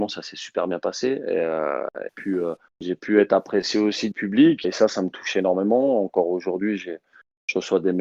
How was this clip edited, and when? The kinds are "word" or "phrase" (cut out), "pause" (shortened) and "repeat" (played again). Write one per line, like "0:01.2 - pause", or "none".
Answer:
0:02.1 - phrase
0:02.7 - pause
0:04.1 - phrase
0:04.6 - word

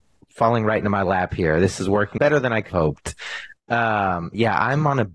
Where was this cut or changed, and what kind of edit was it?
0:02.2 - word
0:02.7 - word

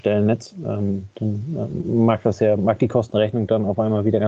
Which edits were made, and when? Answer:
none

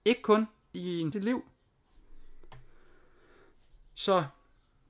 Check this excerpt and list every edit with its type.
0:01.1 - phrase

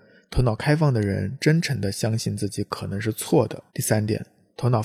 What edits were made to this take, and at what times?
0:03.7 - pause

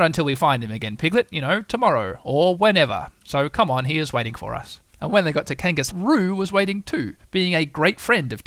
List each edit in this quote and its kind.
0:04.9 - pause
0:05.9 - phrase

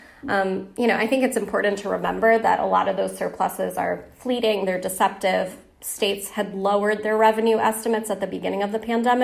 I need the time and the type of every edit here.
none

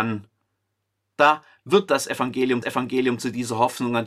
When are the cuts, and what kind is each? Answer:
0:02.6 - repeat

